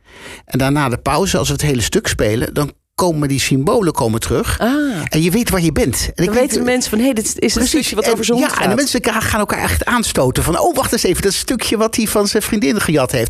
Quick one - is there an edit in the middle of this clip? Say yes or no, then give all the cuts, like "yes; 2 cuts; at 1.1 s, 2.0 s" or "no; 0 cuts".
no; 0 cuts